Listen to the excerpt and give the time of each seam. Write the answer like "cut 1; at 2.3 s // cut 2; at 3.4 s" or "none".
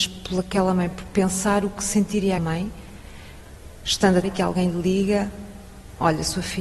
cut 1; at 2.4 s // cut 2; at 4.2 s